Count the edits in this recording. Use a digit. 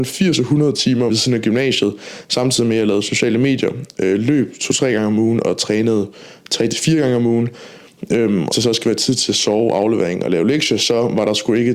2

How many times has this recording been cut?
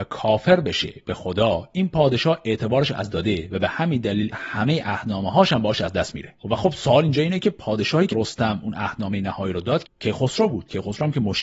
5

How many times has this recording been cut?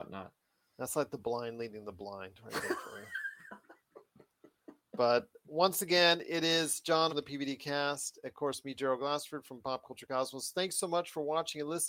1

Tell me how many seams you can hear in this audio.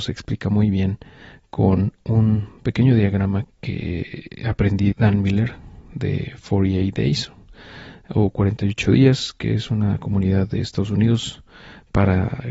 2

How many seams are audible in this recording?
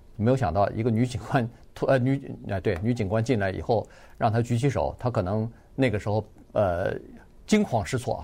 0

